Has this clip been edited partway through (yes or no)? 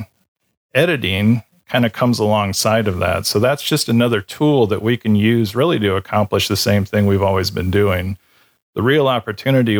no